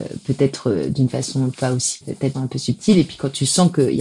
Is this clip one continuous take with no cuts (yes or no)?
no